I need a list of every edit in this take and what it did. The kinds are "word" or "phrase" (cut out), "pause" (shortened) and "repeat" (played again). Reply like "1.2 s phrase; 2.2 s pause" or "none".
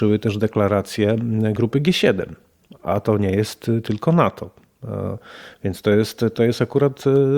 none